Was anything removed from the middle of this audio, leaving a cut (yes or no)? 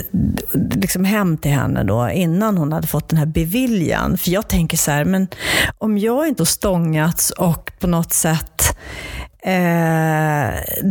yes